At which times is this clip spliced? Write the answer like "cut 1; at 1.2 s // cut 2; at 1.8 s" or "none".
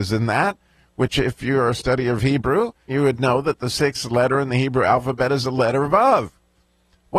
cut 1; at 2.9 s